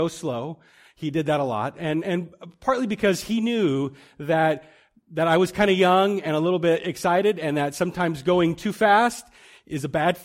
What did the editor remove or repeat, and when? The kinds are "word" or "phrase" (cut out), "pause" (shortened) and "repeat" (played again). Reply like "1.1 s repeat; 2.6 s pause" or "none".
none